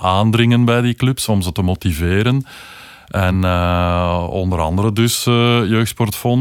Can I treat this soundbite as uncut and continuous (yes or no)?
yes